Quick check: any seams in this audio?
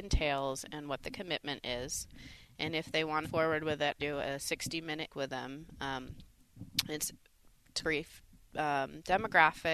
yes; 4 cuts; at 3.2 s, 4.0 s, 5.1 s, 7.8 s

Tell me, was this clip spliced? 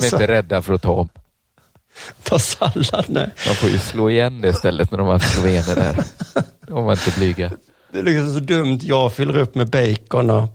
no; 0 cuts

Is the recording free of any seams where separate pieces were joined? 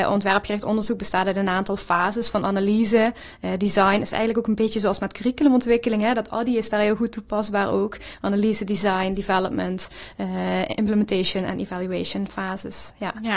yes; 0 cuts

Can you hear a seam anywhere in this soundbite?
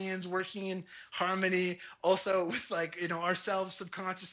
no; 0 cuts

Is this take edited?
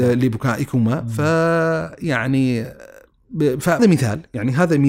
yes; 1 cut; at 3.8 s

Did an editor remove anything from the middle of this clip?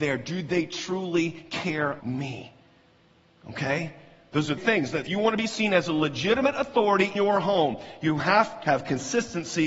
yes; 5 cuts; at 2.0 s, 4.6 s, 5.0 s, 7.1 s, 8.6 s

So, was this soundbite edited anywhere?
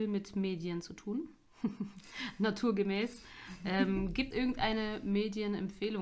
yes; 1 cut; at 4.3 s

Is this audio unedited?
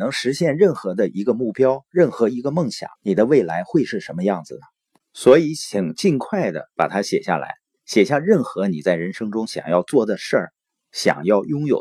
no; 1 cut; at 3.0 s

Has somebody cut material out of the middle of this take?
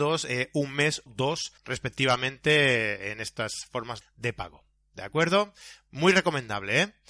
yes; 3 cuts; at 1.1 s, 1.6 s, 4.0 s

